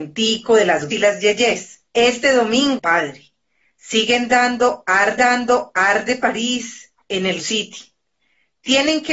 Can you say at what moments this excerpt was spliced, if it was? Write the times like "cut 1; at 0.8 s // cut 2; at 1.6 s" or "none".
cut 1; at 0.9 s // cut 2; at 1.9 s // cut 3; at 2.8 s // cut 4; at 5.2 s // cut 5; at 7.0 s // cut 6; at 7.4 s